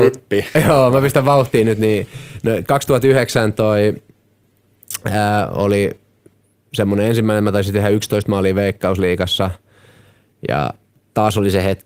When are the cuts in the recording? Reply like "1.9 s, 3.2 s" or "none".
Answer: none

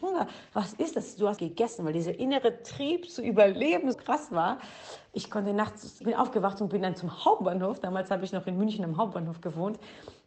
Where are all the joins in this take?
1.4 s, 3.9 s, 6.0 s

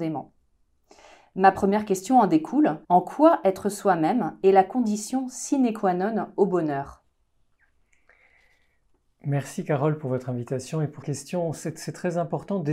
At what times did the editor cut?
2.8 s, 11.0 s

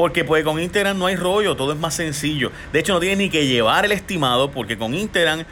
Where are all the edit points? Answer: none

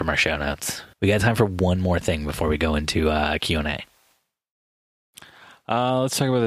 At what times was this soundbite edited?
0.9 s

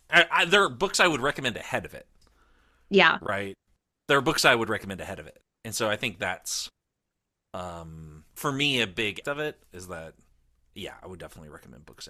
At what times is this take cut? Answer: 8.3 s, 9.2 s, 10.3 s

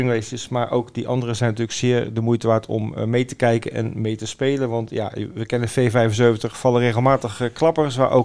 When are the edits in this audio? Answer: none

